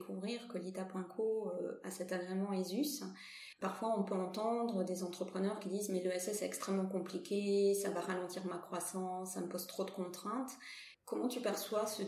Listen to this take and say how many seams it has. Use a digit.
2